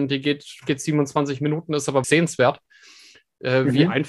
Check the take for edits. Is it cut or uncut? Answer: cut